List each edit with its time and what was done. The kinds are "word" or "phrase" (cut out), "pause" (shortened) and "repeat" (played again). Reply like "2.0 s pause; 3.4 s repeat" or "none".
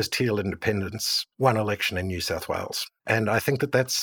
1.3 s pause; 3.0 s pause